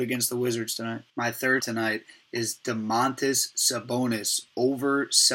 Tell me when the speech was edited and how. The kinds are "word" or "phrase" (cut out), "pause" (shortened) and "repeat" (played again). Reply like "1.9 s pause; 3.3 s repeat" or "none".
1.1 s pause; 1.6 s phrase